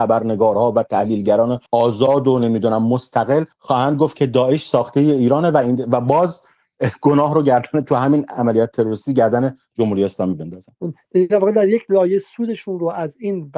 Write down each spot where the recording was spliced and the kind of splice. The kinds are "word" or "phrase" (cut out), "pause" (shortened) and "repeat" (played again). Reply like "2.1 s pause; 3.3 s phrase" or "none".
1.7 s pause; 3.5 s pause